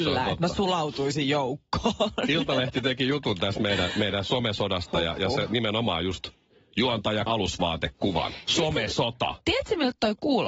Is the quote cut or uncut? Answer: cut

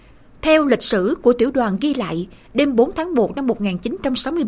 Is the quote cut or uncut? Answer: uncut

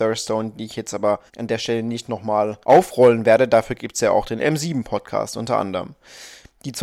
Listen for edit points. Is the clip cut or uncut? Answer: cut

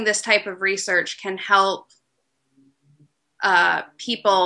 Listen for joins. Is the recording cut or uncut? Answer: uncut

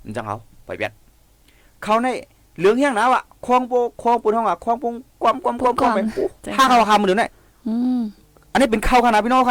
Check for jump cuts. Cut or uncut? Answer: uncut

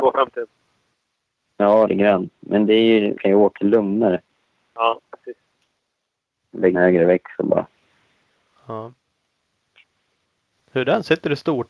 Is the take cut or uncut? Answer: cut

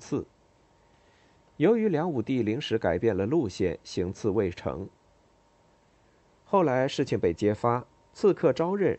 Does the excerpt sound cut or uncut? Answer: uncut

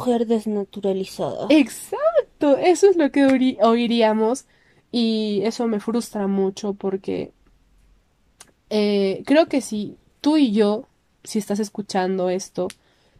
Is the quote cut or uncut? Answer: uncut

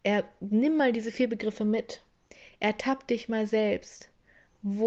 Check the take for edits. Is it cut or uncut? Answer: uncut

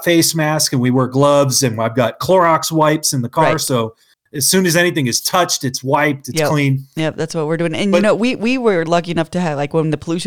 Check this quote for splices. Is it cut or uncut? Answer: uncut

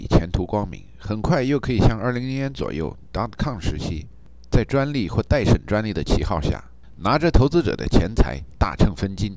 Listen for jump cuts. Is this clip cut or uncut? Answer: uncut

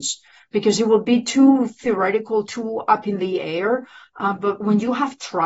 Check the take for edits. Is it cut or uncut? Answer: uncut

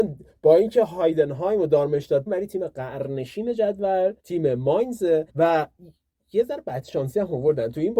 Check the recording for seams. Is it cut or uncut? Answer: cut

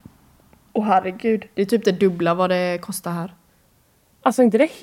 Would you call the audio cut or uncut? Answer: uncut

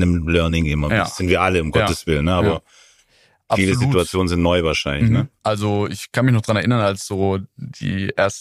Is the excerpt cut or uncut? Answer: uncut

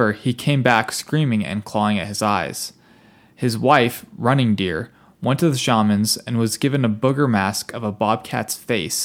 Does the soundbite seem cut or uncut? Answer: uncut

